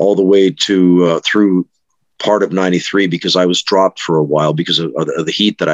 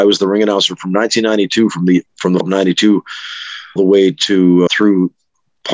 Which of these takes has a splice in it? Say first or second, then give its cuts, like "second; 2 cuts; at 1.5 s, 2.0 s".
second; 4 cuts; at 2.1 s, 2.4 s, 3.8 s, 4.7 s